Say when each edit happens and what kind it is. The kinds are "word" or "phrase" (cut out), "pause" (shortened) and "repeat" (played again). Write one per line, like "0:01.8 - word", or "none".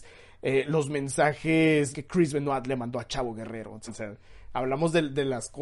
0:01.9 - word
0:03.9 - word